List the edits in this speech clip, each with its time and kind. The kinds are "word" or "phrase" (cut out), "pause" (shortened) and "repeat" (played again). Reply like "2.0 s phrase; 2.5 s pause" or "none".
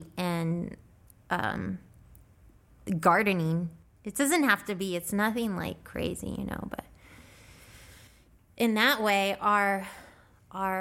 none